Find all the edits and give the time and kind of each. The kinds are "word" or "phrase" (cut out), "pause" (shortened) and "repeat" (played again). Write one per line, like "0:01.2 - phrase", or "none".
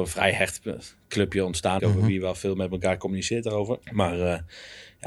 0:01.8 - word
0:03.8 - pause